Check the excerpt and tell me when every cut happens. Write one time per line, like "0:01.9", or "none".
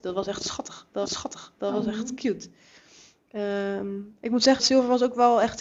0:01.1
0:04.6